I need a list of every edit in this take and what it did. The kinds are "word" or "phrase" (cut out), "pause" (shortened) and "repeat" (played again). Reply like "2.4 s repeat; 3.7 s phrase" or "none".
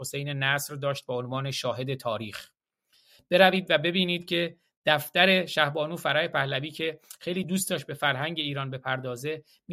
none